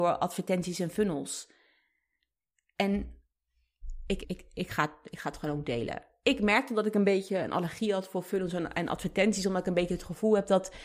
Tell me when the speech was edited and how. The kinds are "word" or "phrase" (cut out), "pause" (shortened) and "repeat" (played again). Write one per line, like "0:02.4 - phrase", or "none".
0:04.2 - word